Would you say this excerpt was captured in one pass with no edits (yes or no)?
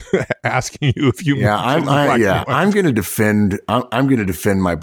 yes